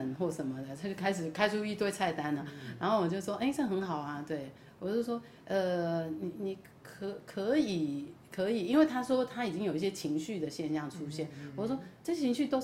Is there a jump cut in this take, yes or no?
no